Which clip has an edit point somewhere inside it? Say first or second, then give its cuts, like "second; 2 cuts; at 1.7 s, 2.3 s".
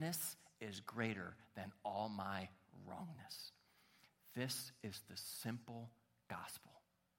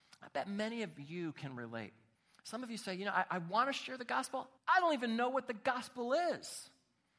second; 2 cuts; at 2.2 s, 4.6 s